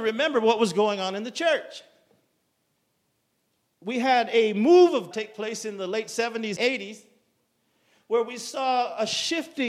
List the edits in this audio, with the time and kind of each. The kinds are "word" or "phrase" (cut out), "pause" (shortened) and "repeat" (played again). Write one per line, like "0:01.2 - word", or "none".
0:05.1 - word
0:06.6 - word